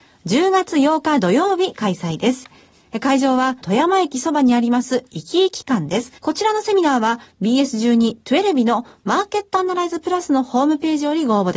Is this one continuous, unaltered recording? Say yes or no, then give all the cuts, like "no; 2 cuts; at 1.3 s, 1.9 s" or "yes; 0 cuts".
no; 2 cuts; at 3.6 s, 6.2 s